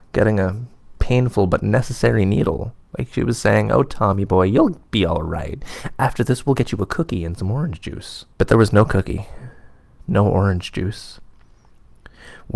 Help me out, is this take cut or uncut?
cut